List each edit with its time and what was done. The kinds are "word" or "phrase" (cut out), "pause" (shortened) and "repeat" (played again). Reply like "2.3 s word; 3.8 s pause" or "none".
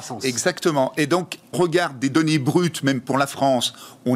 1.5 s phrase

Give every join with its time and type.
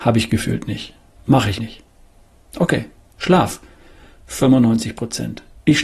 1.6 s word

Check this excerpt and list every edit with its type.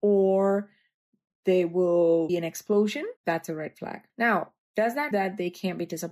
2.3 s word; 3.2 s pause; 4.1 s pause; 5.1 s word

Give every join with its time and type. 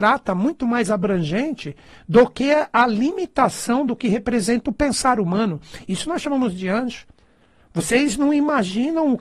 none

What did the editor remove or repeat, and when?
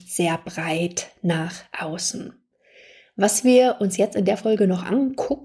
none

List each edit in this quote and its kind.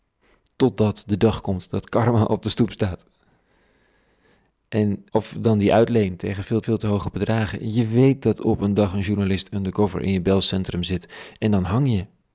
5.1 s pause; 6.6 s repeat

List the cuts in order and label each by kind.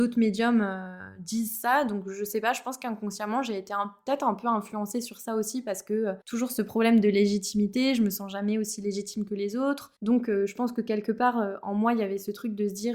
6.2 s pause; 10.0 s pause

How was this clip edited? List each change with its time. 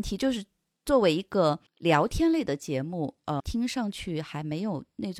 1.7 s pause; 3.4 s word

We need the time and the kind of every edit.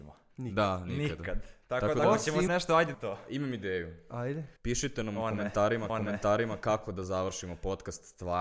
1.6 s pause; 2.5 s phrase; 2.9 s word; 4.6 s pause; 5.9 s repeat

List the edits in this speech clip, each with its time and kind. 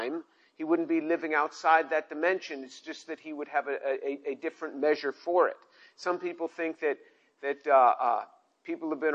none

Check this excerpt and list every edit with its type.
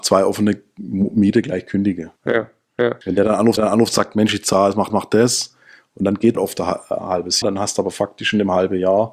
2.2 s pause; 3.0 s pause; 3.6 s repeat; 4.9 s repeat; 6.3 s word; 7.4 s word

